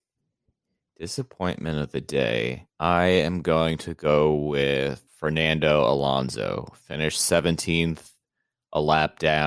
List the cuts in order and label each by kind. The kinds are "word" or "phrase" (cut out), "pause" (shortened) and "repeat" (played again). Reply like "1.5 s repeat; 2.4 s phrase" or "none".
2.7 s pause; 5.1 s pause